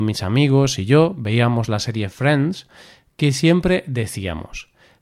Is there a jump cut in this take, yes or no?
no